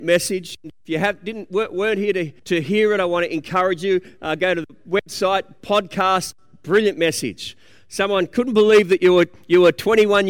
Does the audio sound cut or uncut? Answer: cut